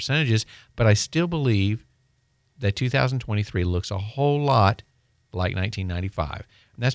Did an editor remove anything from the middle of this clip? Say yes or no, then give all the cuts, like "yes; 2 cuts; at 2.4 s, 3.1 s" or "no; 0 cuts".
no; 0 cuts